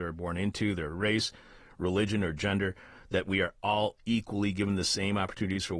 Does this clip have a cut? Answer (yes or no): no